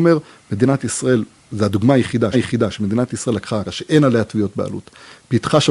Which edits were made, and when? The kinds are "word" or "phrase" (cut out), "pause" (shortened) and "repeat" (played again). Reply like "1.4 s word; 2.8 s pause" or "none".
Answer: 2.3 s repeat; 3.7 s word